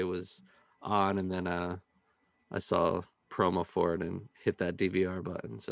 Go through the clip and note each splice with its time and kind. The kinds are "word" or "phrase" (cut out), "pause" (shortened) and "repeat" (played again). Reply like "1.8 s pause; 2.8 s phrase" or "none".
none